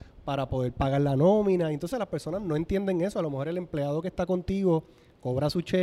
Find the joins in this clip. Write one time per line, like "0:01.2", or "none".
0:01.9